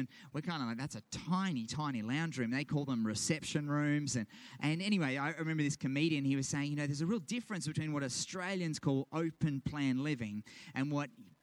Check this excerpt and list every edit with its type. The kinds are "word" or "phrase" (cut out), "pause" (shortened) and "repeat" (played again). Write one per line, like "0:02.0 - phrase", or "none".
none